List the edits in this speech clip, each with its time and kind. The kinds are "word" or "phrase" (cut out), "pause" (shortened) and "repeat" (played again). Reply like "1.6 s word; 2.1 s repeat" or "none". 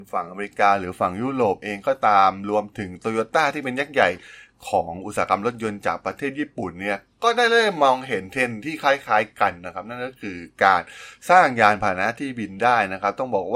none